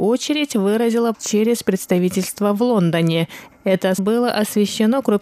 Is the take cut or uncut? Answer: cut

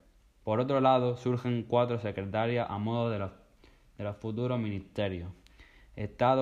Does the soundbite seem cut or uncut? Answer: uncut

